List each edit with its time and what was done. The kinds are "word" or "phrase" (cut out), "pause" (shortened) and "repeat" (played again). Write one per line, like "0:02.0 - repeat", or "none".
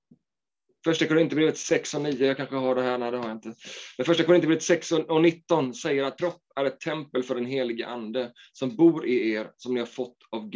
0:06.2 - word